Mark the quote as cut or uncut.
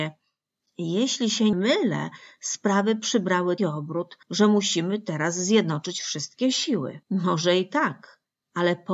cut